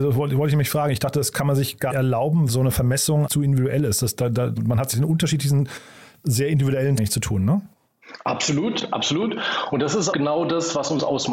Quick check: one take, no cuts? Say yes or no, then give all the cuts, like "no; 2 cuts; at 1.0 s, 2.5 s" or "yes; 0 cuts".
no; 7 cuts; at 1.9 s, 2.5 s, 3.3 s, 4.6 s, 4.9 s, 7.0 s, 10.1 s